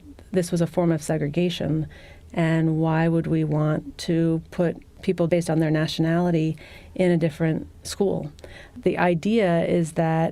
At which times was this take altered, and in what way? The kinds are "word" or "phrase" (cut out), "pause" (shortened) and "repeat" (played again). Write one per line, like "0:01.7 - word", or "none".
0:05.3 - word